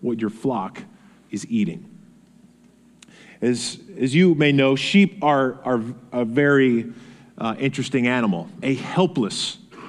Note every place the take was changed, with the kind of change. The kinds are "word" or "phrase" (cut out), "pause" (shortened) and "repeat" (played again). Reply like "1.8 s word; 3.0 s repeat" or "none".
8.6 s word

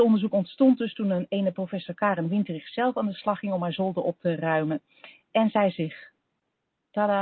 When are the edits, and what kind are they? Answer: none

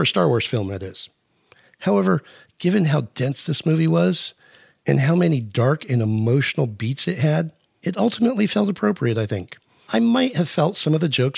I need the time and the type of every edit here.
none

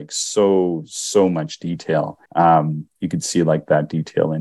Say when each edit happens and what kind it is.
2.3 s pause

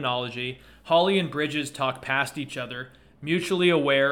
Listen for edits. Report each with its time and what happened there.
none

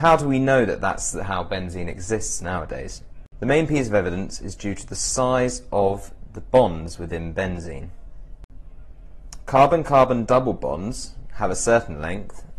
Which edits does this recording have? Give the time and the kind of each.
none

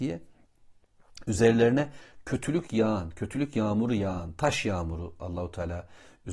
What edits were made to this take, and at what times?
none

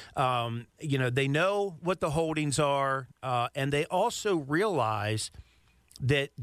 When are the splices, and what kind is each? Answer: 3.1 s pause

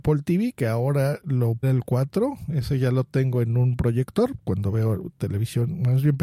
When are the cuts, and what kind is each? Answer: 1.6 s word

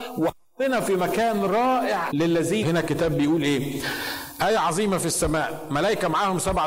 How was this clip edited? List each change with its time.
2.1 s word; 2.6 s word

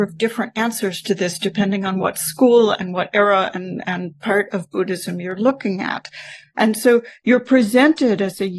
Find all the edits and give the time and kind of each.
none

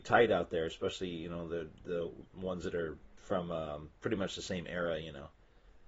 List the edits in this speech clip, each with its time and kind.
4.0 s pause

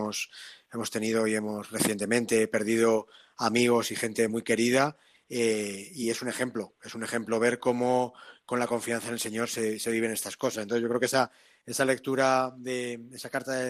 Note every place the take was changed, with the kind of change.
none

